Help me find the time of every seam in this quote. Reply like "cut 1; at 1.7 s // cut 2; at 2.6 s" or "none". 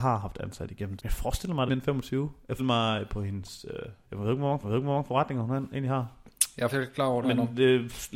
cut 1; at 1.0 s // cut 2; at 1.7 s // cut 3; at 2.6 s // cut 4; at 4.0 s // cut 5; at 4.6 s // cut 6; at 6.7 s // cut 7; at 7.2 s